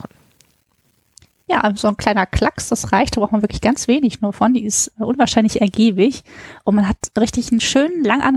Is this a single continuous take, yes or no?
yes